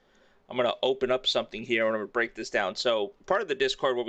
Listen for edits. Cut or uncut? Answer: cut